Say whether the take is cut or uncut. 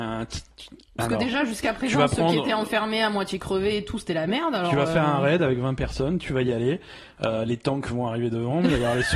uncut